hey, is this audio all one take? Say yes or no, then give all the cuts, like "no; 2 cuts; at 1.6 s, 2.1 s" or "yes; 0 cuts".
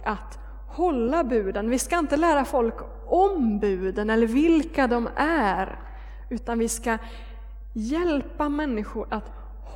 yes; 0 cuts